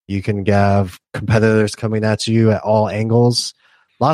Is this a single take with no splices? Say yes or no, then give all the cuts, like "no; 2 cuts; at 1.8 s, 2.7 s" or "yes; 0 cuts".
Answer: yes; 0 cuts